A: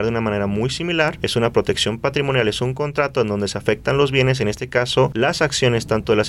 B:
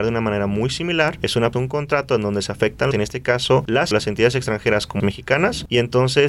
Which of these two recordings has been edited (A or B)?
B